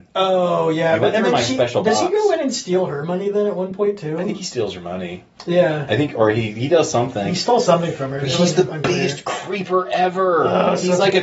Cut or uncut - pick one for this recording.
uncut